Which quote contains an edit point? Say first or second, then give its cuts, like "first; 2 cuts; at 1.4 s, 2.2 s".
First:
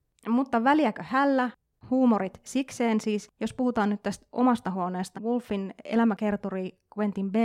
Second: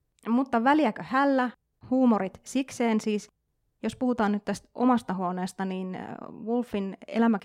first; 2 cuts; at 3.3 s, 5.1 s